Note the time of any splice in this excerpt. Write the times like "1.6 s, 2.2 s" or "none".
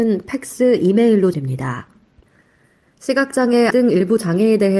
1.3 s, 3.7 s